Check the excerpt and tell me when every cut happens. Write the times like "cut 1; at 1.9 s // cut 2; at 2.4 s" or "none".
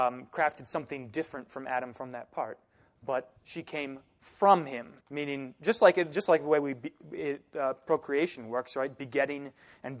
cut 1; at 3.4 s // cut 2; at 5.0 s